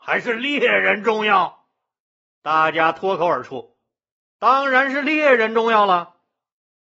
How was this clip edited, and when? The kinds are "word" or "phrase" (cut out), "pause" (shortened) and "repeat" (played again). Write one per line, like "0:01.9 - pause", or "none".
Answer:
none